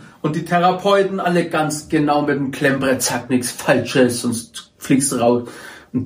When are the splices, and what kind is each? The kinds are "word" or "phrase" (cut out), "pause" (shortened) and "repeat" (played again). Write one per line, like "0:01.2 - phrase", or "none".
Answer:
none